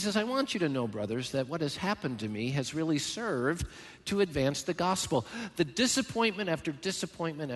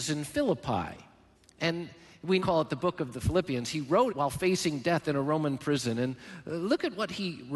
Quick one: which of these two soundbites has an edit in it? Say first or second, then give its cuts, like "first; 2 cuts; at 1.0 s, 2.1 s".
second; 3 cuts; at 1.3 s, 2.4 s, 4.1 s